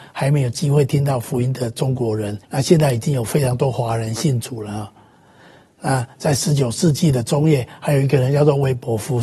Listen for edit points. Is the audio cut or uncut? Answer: cut